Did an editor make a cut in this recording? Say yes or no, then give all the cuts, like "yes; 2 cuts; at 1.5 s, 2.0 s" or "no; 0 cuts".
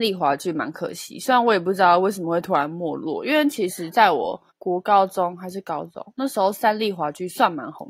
yes; 1 cut; at 4.5 s